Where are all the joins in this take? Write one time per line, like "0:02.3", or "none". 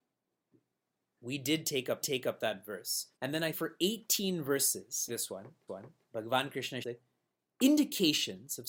0:02.0
0:03.1
0:03.5
0:05.1
0:05.7
0:06.8